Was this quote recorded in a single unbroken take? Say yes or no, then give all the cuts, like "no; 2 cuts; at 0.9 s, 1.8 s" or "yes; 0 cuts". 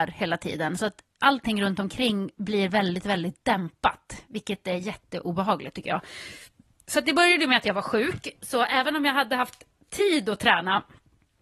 yes; 0 cuts